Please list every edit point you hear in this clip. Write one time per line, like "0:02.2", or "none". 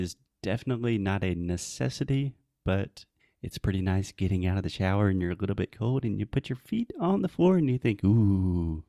0:03.2

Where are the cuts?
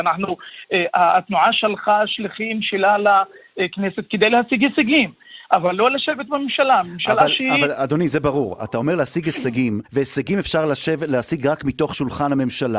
0:09.9

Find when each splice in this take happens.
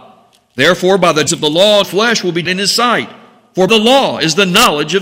0:01.3
0:01.8
0:02.5
0:03.7

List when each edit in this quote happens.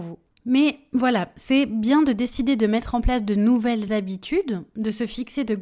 none

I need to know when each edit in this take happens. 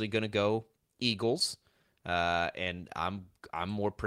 none

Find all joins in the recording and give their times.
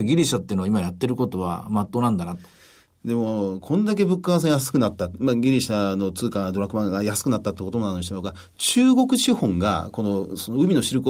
none

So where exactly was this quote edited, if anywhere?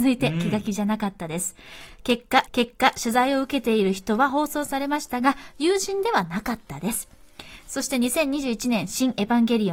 0:02.5

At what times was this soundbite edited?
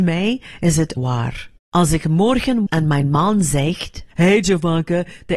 0:01.0
0:01.6
0:02.7
0:04.1

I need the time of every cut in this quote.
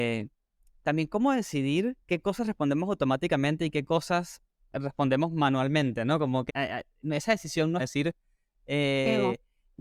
0:02.0
0:06.5
0:07.8

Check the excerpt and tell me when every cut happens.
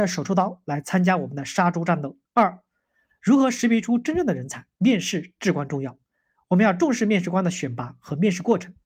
0:02.3
0:04.7

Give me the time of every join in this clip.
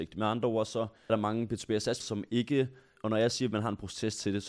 0:01.1
0:02.0
0:03.0

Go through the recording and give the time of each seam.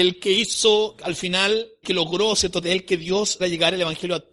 0:01.8
0:02.6
0:03.4

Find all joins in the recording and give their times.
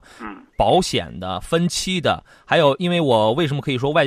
none

